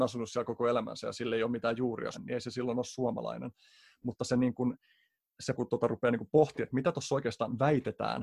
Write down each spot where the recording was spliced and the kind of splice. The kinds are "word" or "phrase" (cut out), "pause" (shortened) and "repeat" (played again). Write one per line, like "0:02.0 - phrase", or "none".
0:02.1 - word
0:05.5 - word